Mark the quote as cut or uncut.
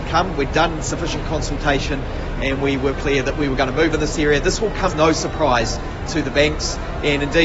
cut